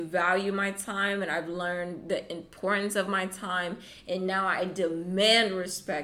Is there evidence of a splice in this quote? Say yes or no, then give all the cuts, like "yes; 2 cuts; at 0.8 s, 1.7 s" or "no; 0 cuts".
no; 0 cuts